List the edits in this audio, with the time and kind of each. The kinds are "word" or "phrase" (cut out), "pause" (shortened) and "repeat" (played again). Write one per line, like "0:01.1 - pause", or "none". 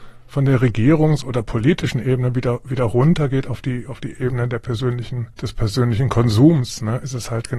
0:05.3 - pause